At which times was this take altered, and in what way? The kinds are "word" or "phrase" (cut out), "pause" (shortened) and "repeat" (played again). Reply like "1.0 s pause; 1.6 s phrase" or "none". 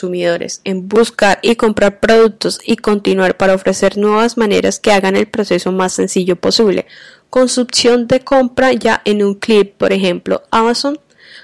none